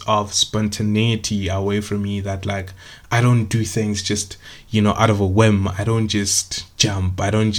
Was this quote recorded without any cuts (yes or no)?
yes